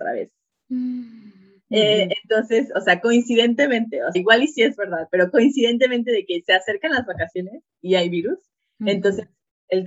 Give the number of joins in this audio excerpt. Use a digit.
1